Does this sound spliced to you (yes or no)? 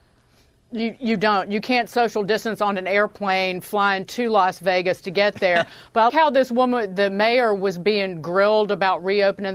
yes